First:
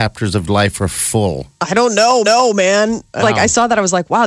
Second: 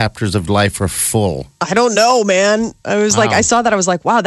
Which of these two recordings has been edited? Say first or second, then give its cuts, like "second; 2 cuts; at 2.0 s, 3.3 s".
first; 2 cuts; at 2.2 s, 3.2 s